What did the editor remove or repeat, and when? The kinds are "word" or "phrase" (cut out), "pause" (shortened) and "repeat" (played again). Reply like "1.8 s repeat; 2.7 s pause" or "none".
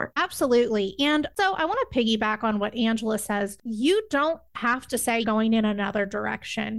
1.4 s word; 5.2 s word